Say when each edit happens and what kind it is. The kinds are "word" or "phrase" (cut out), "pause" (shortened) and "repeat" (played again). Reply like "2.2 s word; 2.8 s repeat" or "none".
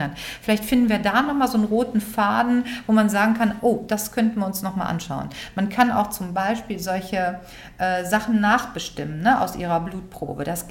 none